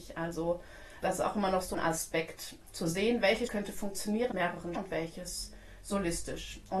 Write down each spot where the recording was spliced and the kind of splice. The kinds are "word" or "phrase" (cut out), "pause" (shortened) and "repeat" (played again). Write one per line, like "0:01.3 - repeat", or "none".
0:01.0 - word
0:01.7 - word
0:03.5 - word
0:04.3 - word
0:04.8 - word